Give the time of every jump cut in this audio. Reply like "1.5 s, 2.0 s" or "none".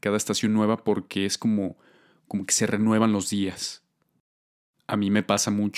none